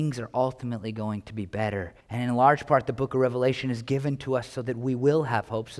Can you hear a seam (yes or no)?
yes